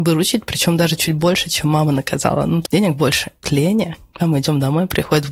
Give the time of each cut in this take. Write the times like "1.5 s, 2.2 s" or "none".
2.6 s, 3.4 s, 4.2 s